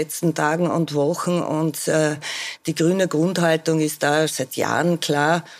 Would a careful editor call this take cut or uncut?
cut